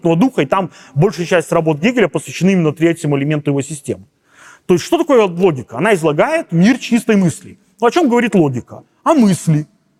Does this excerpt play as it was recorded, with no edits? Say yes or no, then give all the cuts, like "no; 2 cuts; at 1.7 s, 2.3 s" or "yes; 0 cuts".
yes; 0 cuts